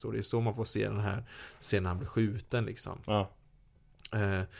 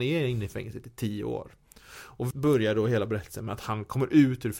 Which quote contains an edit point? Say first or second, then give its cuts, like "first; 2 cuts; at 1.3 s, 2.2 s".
second; 1 cut; at 2.3 s